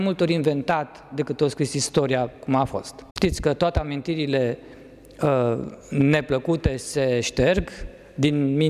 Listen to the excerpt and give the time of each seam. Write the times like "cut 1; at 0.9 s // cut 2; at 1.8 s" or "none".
cut 1; at 3.1 s // cut 2; at 5.8 s